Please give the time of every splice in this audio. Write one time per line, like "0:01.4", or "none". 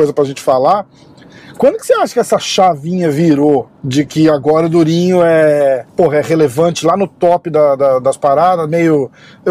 0:03.7
0:05.9